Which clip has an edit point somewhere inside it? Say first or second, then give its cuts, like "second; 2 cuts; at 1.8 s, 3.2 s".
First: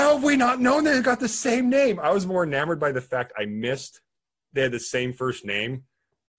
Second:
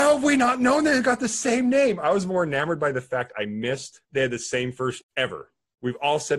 second; 2 cuts; at 4.1 s, 5.0 s